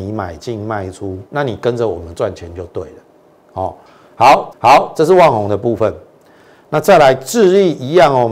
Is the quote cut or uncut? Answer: cut